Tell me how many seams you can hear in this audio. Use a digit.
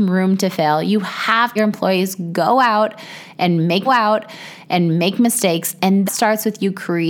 3